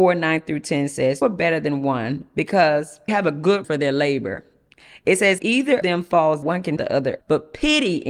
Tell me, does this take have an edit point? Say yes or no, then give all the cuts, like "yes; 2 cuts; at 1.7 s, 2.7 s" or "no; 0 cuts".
yes; 8 cuts; at 1.2 s, 3.1 s, 3.6 s, 5.4 s, 5.8 s, 6.4 s, 6.8 s, 7.2 s